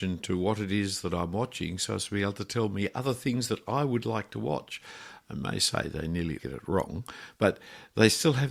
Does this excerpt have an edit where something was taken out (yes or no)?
yes